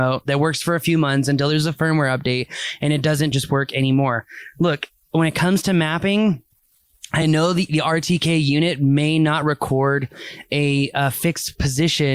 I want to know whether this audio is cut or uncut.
uncut